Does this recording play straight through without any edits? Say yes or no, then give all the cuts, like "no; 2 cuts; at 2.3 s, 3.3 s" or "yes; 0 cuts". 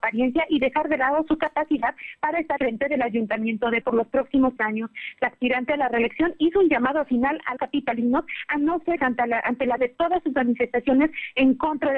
no; 6 cuts; at 2.6 s, 3.8 s, 4.6 s, 7.6 s, 9.0 s, 9.8 s